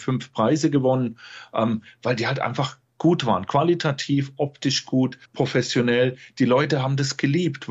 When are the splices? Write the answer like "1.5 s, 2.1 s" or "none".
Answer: 5.3 s

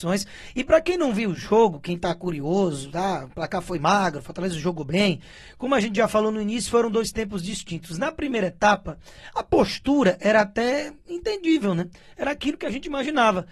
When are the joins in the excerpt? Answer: none

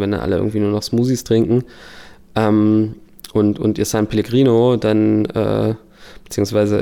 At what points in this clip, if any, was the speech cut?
none

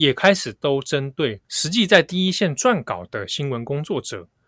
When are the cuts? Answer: 1.4 s

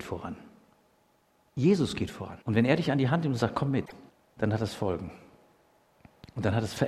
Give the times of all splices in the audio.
2.4 s, 4.1 s

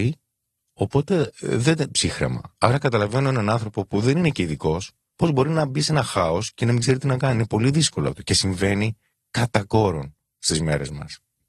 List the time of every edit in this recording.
1.9 s

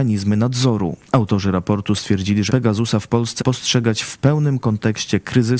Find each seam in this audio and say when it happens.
1.1 s, 2.5 s, 3.4 s

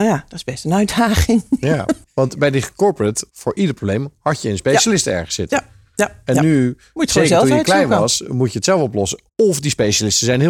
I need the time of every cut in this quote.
3.3 s, 9.3 s

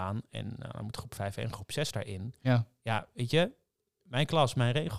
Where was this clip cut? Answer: none

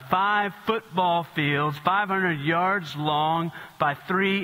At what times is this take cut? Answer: none

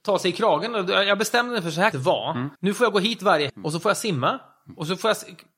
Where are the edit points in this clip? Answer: 1.9 s, 2.5 s, 3.5 s

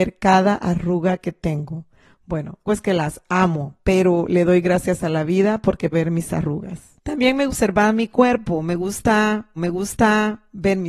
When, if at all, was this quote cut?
2.6 s, 3.8 s, 5.9 s, 6.9 s, 7.5 s, 9.6 s

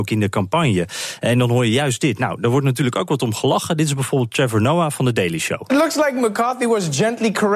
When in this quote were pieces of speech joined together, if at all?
none

